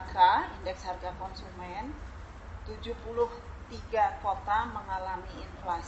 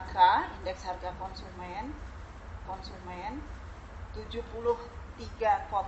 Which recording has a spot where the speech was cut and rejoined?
second; 1 cut; at 2.6 s

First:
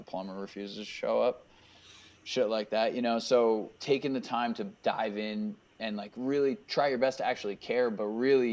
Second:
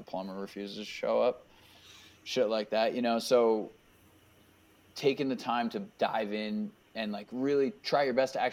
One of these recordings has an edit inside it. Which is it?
first; 1 cut; at 3.8 s

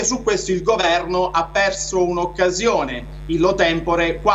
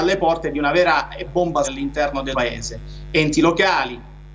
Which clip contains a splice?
second; 3 cuts; at 1.3 s, 1.6 s, 2.3 s

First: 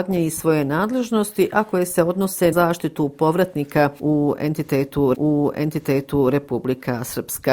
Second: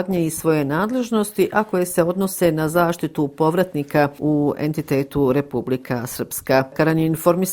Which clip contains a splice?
first; 2 cuts; at 2.5 s, 5.1 s

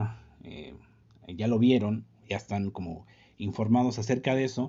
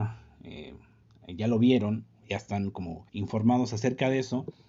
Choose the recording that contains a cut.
second; 1 cut; at 3.1 s

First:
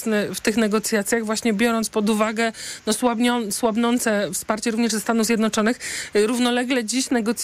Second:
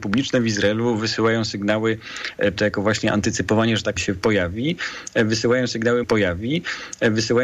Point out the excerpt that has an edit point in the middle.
second; 3 cuts; at 2.6 s, 4.0 s, 6.0 s

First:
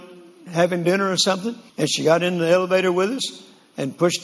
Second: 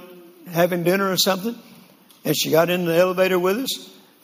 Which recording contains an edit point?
first; 1 cut; at 1.7 s

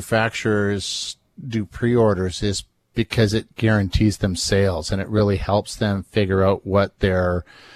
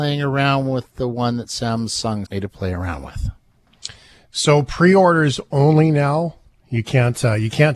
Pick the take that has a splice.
second; 1 cut; at 2.3 s

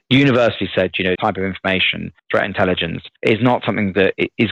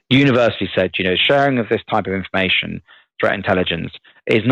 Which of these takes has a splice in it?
first; 3 cuts; at 1.1 s, 2.2 s, 3.2 s

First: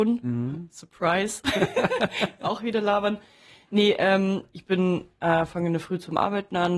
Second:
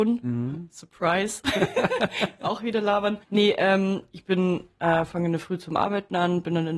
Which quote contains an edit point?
second; 1 cut; at 3.2 s

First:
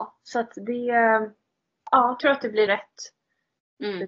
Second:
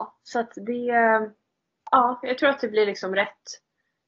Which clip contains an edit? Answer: first; 2 cuts; at 2.2 s, 2.7 s

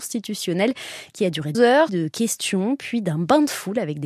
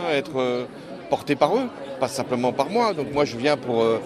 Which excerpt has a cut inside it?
first; 2 cuts; at 1.5 s, 1.9 s

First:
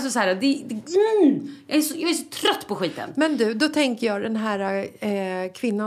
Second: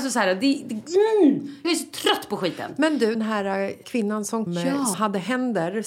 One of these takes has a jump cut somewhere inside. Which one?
second; 5 cuts; at 1.6 s, 3.1 s, 3.8 s, 4.5 s, 4.9 s

